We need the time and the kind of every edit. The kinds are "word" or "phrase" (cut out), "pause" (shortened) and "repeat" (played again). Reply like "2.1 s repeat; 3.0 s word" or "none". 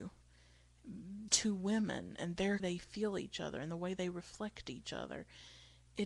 1.3 s word; 2.6 s phrase